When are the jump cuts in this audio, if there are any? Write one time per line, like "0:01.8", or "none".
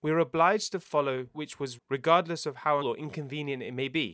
0:01.3
0:01.8
0:02.8